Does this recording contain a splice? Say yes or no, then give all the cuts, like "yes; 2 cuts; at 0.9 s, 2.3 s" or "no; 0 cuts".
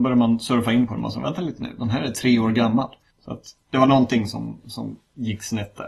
no; 0 cuts